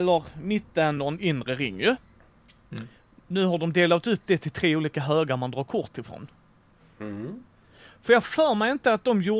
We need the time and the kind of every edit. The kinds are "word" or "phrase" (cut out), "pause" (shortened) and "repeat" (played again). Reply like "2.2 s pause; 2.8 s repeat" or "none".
none

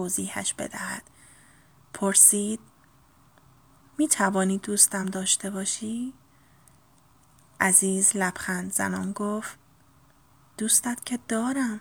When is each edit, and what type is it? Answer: none

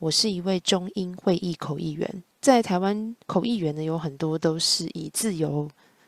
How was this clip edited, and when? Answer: 2.3 s pause; 3.2 s pause

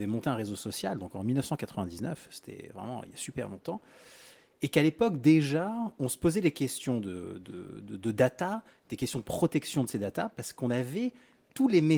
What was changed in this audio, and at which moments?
none

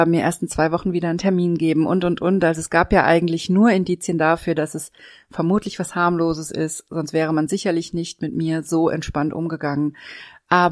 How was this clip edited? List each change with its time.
none

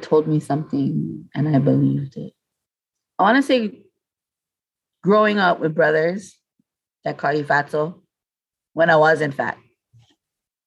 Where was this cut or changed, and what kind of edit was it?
none

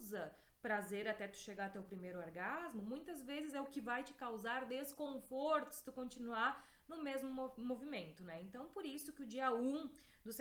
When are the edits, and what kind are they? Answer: none

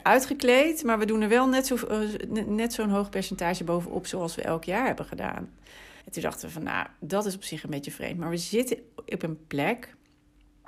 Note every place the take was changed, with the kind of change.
6.0 s pause

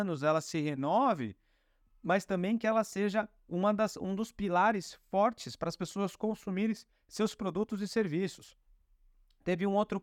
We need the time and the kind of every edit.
none

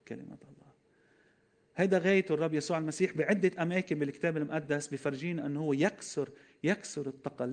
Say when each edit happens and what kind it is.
none

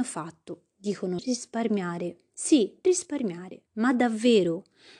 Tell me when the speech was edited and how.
1.2 s phrase; 2.8 s word; 3.7 s pause

